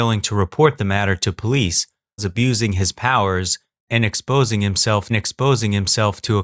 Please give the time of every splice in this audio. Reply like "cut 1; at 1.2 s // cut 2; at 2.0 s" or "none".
cut 1; at 2.2 s // cut 2; at 5.1 s